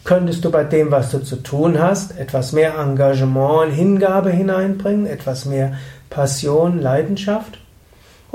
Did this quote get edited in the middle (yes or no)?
no